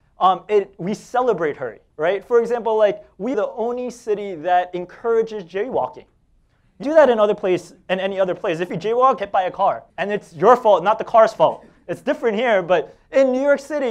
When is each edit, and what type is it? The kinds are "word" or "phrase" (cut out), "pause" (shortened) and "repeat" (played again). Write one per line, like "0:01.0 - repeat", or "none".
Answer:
0:01.9 - pause
0:03.3 - phrase
0:06.8 - word
0:09.2 - phrase
0:09.9 - pause